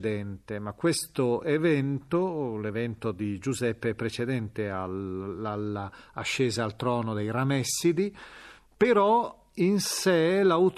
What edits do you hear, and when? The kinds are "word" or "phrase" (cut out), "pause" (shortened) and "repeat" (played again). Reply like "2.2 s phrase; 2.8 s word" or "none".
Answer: none